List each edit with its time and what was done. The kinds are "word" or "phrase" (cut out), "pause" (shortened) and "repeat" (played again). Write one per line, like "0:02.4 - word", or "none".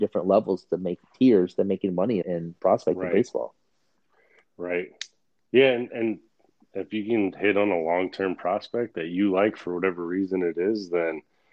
0:02.2 - word